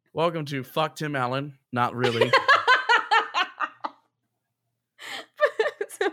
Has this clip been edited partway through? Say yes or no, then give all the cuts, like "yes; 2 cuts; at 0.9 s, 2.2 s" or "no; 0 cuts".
yes; 1 cut; at 1.6 s